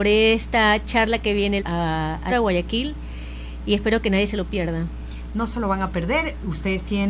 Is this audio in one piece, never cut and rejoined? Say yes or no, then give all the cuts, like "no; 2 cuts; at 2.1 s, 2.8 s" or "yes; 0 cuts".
no; 2 cuts; at 1.6 s, 2.3 s